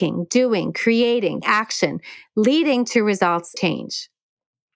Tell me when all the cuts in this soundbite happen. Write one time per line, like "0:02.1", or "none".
0:01.4
0:03.6

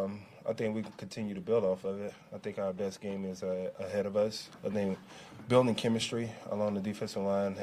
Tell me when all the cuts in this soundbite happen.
none

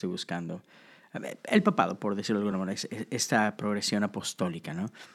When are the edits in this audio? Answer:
none

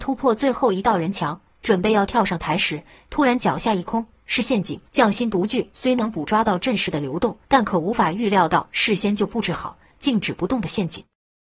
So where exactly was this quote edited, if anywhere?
0:04.9
0:07.4

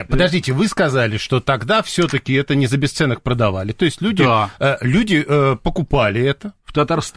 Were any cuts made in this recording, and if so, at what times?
none

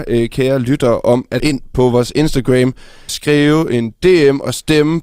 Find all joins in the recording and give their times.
0:01.4
0:03.1

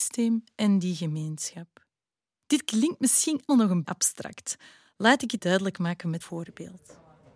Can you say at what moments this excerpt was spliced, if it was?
0:03.5
0:03.8
0:05.4
0:06.2

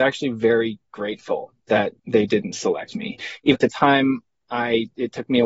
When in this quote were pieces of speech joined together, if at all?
0:02.0
0:03.5

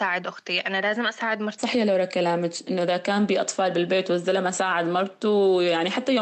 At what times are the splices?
0:01.6

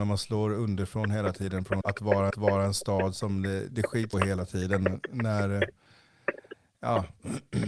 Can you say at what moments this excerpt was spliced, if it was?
0:01.8
0:02.3
0:03.7
0:04.1

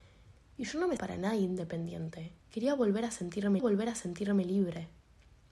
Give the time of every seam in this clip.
0:01.0
0:02.4
0:03.6

